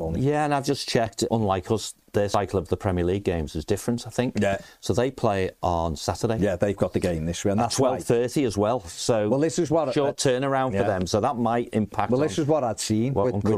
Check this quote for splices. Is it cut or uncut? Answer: cut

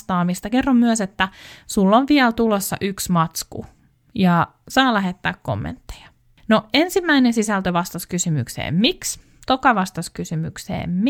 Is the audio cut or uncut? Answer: uncut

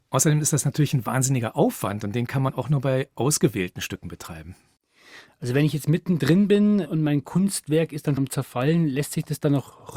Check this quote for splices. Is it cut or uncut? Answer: cut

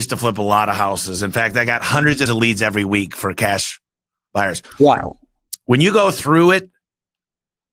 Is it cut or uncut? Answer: cut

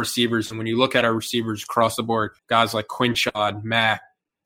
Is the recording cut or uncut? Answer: cut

